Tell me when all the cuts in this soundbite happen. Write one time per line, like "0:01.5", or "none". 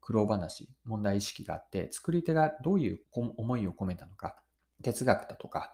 0:03.0
0:04.6